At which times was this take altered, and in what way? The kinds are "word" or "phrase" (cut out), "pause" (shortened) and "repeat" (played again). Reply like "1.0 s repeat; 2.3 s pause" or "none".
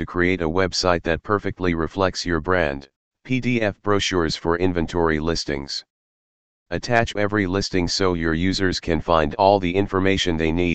3.1 s pause; 7.2 s phrase